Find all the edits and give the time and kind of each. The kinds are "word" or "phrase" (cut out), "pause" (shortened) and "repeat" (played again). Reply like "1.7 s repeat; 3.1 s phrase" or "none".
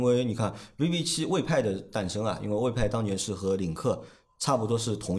none